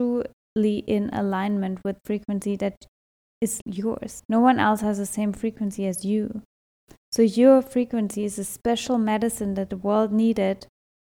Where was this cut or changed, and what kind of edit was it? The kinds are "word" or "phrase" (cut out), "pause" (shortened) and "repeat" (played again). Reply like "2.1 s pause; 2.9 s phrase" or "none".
2.0 s word; 3.6 s word

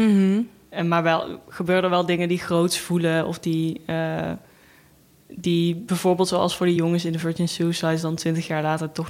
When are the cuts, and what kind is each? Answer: none

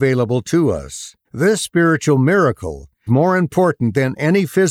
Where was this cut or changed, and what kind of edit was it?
1.2 s pause; 3.1 s word

